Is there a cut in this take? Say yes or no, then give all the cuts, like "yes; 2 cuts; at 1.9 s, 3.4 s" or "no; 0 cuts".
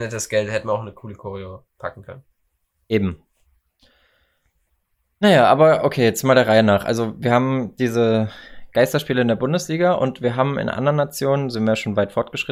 no; 0 cuts